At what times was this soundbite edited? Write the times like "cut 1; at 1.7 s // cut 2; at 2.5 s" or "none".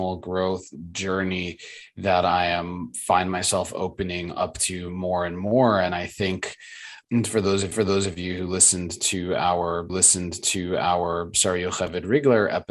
cut 1; at 7.0 s // cut 2; at 7.7 s // cut 3; at 9.9 s